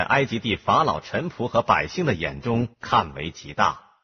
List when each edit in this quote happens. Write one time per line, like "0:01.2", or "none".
0:02.7